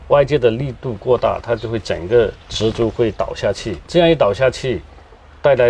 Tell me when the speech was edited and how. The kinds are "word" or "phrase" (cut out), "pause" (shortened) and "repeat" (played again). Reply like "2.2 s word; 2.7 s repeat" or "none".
2.4 s pause; 3.9 s pause